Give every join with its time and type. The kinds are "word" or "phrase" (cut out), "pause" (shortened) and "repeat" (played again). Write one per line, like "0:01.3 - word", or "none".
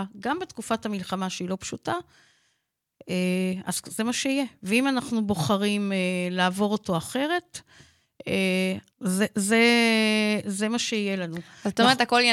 0:08.9 - pause